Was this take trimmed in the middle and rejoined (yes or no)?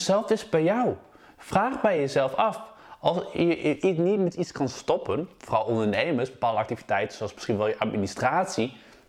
no